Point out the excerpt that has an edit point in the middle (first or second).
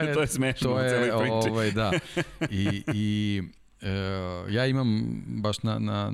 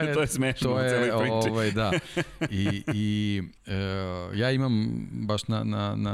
second